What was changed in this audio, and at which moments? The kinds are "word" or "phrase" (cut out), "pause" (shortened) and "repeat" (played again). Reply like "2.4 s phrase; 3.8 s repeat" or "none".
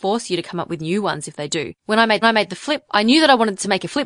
1.8 s pause; 2.2 s repeat; 2.9 s word